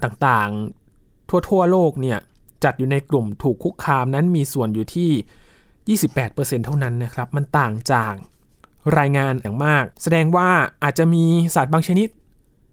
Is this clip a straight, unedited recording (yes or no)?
no